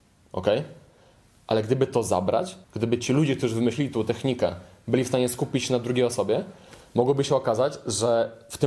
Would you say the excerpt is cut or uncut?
cut